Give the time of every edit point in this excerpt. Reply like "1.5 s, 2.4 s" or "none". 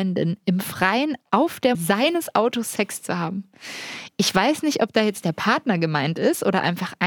1.7 s